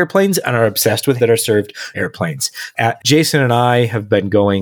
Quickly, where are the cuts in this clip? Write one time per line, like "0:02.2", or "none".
0:01.2
0:01.9
0:03.0